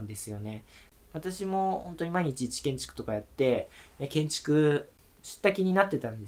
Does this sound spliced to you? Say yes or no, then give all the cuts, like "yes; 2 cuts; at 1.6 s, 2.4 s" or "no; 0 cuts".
no; 0 cuts